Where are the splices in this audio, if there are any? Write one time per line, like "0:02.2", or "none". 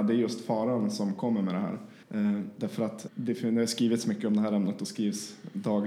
0:02.0
0:03.1